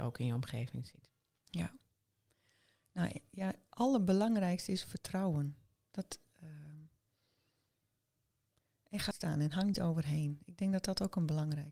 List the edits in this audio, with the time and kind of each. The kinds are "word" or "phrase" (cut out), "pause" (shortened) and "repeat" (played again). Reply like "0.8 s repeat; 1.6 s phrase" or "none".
3.7 s word; 9.1 s word; 9.7 s word